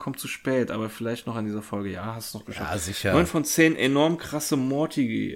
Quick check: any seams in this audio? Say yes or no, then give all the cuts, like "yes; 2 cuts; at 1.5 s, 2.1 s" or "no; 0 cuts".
no; 0 cuts